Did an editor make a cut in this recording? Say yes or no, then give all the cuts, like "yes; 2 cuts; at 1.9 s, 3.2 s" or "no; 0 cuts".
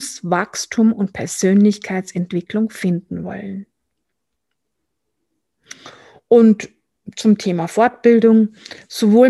no; 0 cuts